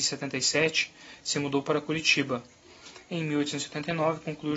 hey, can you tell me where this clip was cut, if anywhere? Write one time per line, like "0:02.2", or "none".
none